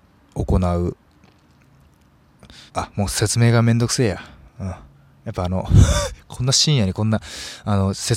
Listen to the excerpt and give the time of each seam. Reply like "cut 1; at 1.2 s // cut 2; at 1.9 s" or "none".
cut 1; at 2.7 s // cut 2; at 4.9 s